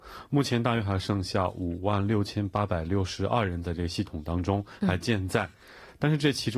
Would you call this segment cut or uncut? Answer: uncut